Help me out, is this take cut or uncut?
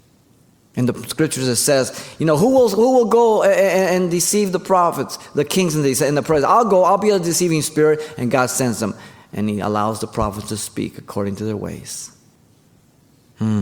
uncut